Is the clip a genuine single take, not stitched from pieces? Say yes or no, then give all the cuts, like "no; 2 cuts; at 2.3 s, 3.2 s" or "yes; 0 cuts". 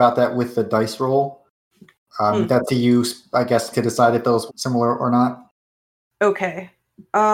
no; 3 cuts; at 2.7 s, 3.7 s, 4.5 s